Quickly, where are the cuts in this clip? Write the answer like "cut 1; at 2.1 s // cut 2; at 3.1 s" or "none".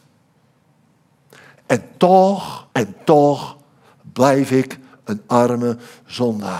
cut 1; at 2.7 s